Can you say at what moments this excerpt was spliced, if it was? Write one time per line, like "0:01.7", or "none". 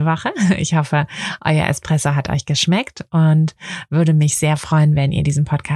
none